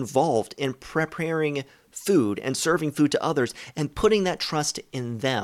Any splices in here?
no; 0 cuts

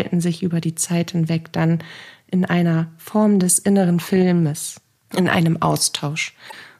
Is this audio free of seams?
no; 1 cut; at 5.0 s

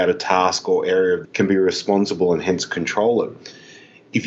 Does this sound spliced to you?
yes; 1 cut; at 1.2 s

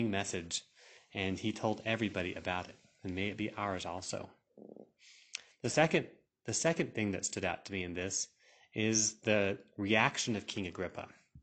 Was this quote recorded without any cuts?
yes; 0 cuts

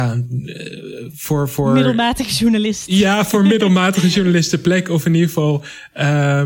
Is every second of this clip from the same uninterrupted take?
yes; 0 cuts

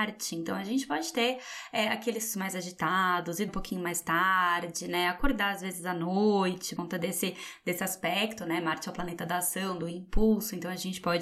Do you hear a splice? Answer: yes; 3 cuts; at 2.3 s, 3.5 s, 6.8 s

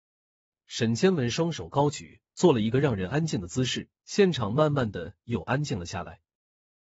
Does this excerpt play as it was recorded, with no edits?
no; 2 cuts; at 2.3 s, 4.0 s

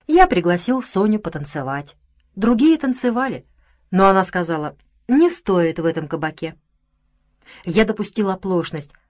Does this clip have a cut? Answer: no; 0 cuts

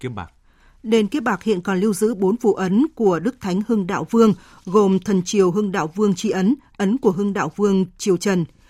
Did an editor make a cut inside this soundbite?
no; 0 cuts

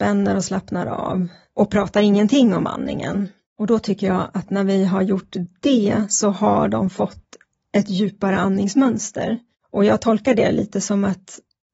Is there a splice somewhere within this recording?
no; 0 cuts

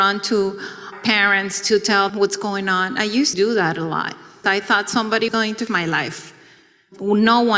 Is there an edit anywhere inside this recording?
yes; 6 cuts; at 0.9 s, 2.1 s, 3.3 s, 4.4 s, 5.3 s, 5.7 s

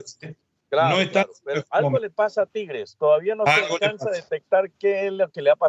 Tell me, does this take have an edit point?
no; 0 cuts

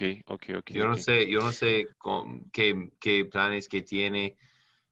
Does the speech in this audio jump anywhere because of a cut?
yes; 1 cut; at 1.9 s

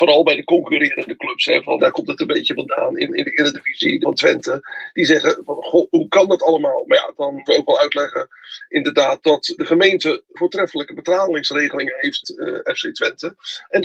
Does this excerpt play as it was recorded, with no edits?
no; 7 cuts; at 1.8 s, 3.1 s, 4.0 s, 7.5 s, 9.6 s, 10.4 s, 12.2 s

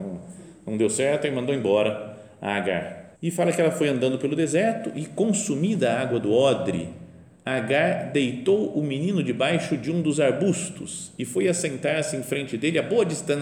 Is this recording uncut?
no; 1 cut; at 3.1 s

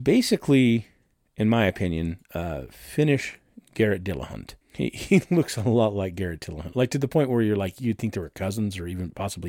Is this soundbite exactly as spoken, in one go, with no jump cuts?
no; 1 cut; at 4.6 s

